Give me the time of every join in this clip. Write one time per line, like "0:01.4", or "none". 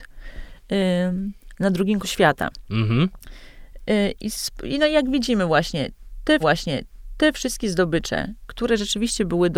0:02.0
0:04.4
0:06.4